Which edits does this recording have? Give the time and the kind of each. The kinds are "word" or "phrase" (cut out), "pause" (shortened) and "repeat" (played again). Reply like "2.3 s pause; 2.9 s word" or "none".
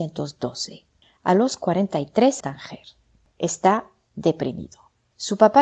2.4 s phrase